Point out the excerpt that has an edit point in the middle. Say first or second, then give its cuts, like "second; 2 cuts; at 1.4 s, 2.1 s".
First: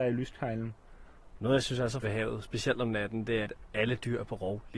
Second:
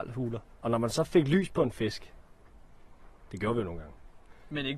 first; 2 cuts; at 2.0 s, 3.4 s